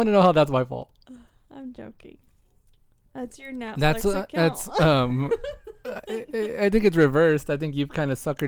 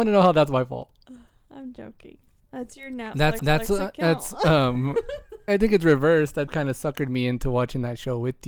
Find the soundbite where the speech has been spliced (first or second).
second